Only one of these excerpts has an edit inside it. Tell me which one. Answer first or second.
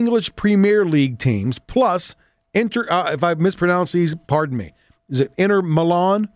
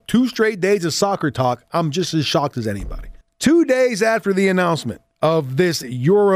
second